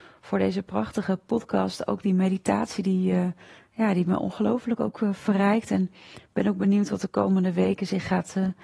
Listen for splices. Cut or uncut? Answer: uncut